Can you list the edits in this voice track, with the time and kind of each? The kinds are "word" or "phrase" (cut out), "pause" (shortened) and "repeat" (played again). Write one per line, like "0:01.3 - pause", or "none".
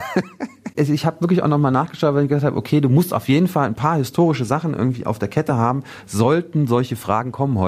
none